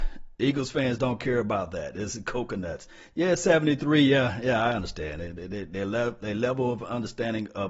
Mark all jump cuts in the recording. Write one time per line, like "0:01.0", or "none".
none